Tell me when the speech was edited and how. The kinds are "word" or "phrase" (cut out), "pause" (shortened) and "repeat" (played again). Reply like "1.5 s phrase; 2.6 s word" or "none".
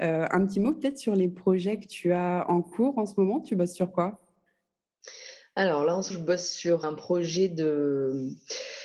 6.1 s word; 6.8 s word

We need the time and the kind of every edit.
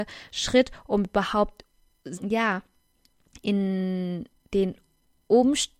2.2 s word; 4.3 s pause

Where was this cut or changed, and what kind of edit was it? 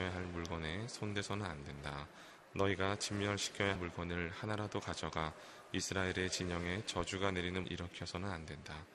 3.7 s word; 7.6 s word

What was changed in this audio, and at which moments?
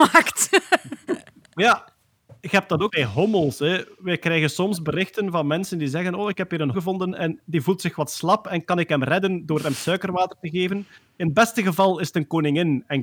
2.9 s word; 6.7 s word

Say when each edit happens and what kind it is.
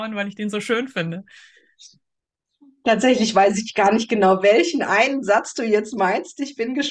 none

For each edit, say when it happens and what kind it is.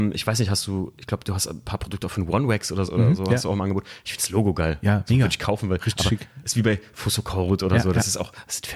2.8 s word

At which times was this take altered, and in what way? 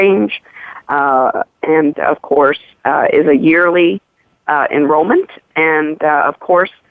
1.9 s word

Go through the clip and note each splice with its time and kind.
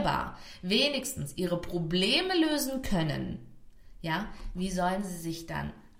none

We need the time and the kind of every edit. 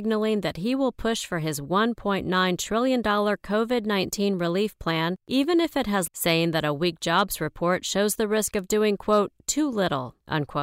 6.1 s phrase

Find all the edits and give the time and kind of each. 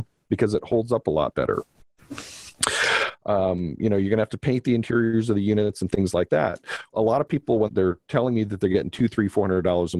6.9 s word; 7.7 s word

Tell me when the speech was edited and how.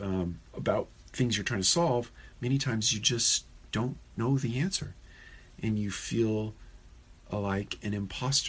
none

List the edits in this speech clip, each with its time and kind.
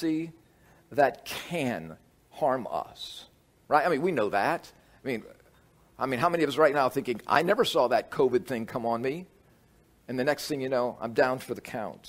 none

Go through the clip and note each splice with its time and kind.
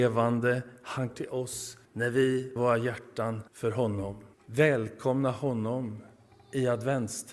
1.1 s word; 1.8 s pause; 2.6 s word; 3.5 s pause; 4.3 s pause

